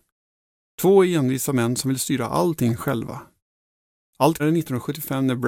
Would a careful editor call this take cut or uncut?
cut